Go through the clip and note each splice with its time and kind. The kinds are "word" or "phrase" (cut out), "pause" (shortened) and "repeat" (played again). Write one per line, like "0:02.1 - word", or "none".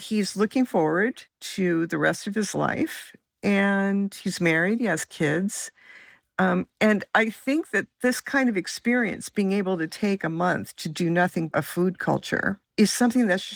0:01.3 - pause
0:11.5 - phrase